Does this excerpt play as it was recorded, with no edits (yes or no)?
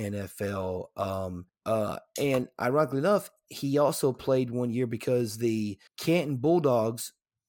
no